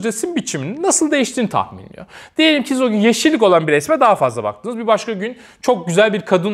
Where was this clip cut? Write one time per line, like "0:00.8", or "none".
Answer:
none